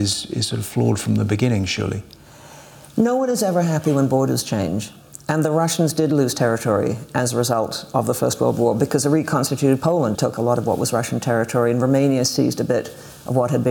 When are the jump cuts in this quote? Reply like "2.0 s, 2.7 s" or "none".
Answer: 10.1 s